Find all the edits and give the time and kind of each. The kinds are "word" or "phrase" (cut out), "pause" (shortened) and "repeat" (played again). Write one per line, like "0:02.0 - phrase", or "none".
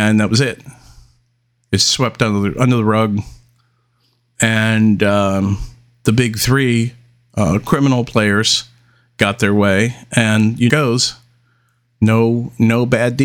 0:10.7 - phrase